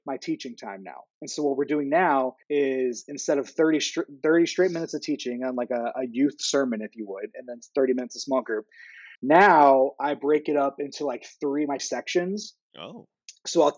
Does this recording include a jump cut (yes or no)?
yes